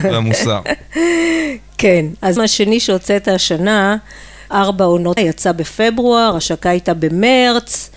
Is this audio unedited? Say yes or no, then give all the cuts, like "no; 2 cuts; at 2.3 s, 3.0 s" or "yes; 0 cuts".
no; 3 cuts; at 2.4 s, 4.5 s, 5.2 s